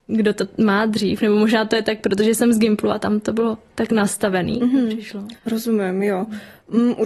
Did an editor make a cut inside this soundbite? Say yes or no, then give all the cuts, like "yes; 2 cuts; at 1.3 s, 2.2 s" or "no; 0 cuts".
yes; 1 cut; at 5.4 s